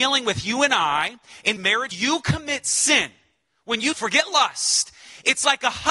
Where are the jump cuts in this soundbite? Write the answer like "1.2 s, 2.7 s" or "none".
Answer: 1.6 s, 1.9 s, 3.9 s